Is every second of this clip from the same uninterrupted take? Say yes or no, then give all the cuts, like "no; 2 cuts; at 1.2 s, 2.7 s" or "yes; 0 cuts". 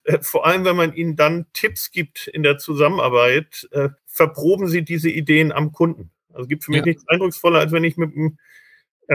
no; 1 cut; at 4.0 s